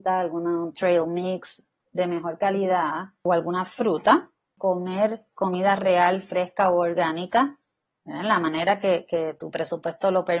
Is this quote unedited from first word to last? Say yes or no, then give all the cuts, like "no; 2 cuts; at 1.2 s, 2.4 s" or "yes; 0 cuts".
yes; 0 cuts